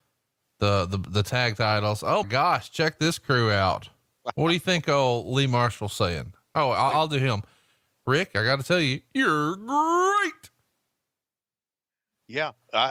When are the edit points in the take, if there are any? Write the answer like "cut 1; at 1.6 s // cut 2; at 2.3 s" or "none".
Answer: cut 1; at 2.2 s // cut 2; at 6.9 s